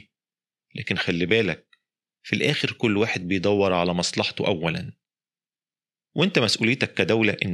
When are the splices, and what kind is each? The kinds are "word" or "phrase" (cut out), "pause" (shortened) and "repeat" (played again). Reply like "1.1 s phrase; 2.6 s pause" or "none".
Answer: none

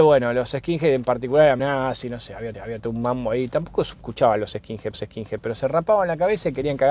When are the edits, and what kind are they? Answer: 1.6 s word; 2.5 s repeat; 4.0 s phrase; 4.9 s repeat

